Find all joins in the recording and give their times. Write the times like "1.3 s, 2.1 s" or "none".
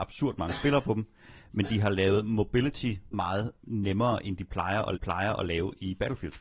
3.1 s, 5.0 s

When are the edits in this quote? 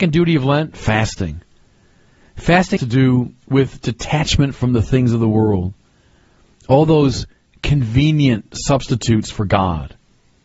2.8 s

